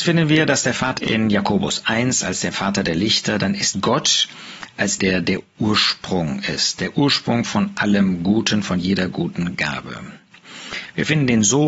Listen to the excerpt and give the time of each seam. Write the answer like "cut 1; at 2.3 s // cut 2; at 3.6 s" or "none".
cut 1; at 1.0 s // cut 2; at 3.7 s // cut 3; at 5.0 s